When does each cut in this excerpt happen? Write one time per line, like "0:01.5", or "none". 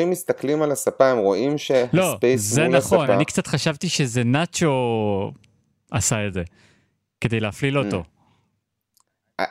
none